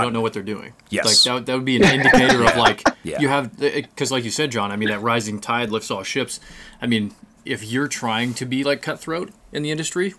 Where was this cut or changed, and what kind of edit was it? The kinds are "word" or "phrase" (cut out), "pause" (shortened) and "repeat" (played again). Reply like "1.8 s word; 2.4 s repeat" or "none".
none